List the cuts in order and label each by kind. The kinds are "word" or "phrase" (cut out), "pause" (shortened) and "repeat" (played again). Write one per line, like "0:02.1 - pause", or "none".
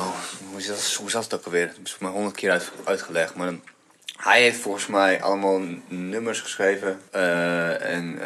0:07.1 - pause